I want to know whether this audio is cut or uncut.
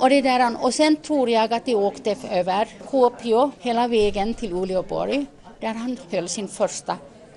uncut